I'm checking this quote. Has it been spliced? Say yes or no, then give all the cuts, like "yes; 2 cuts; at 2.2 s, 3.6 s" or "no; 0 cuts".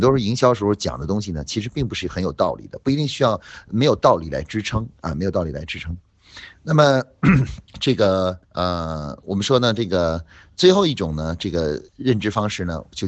yes; 3 cuts; at 7.7 s, 8.4 s, 11.9 s